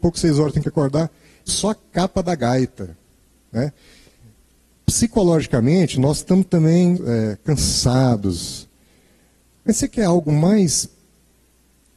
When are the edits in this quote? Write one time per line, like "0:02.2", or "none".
0:01.5
0:07.0